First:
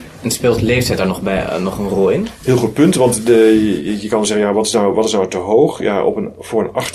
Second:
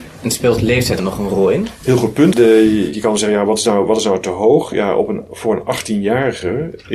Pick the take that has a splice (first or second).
second